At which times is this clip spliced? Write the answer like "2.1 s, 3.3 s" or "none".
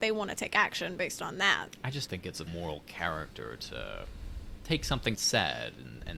2.1 s, 2.5 s, 5.1 s